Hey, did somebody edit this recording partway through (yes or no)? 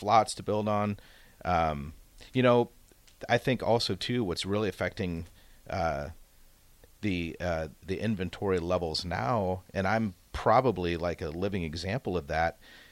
no